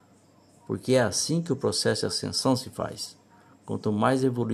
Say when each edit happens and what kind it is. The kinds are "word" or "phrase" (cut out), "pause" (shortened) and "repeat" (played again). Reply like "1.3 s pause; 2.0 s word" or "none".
none

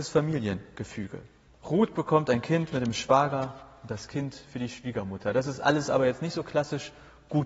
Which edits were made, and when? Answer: 1.5 s pause

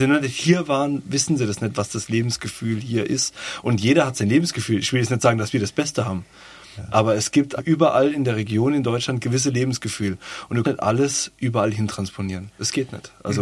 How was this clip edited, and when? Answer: 7.6 s word; 9.2 s phrase; 10.6 s word

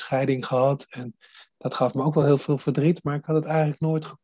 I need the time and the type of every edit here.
none

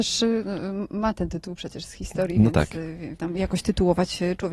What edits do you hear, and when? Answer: 3.2 s phrase

